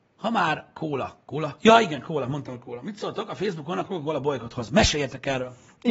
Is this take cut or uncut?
uncut